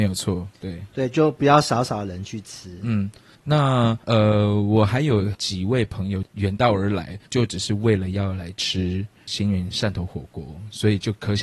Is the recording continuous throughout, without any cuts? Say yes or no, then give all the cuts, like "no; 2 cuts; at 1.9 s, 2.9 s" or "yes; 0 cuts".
no; 2 cuts; at 4.0 s, 7.3 s